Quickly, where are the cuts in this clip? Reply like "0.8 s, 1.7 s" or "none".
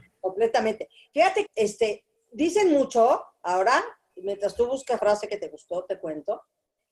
1.5 s, 2.2 s, 4.1 s, 5.0 s